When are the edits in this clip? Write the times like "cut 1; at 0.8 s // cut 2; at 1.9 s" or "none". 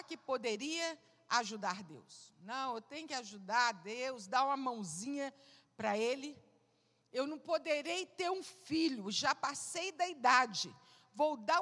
none